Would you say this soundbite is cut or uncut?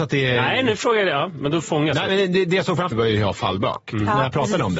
cut